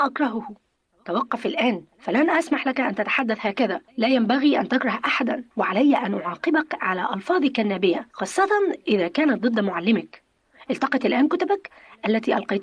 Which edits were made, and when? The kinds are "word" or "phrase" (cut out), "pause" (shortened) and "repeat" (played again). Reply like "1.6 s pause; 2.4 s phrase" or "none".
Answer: 1.9 s pause; 3.9 s pause; 5.5 s pause; 8.1 s pause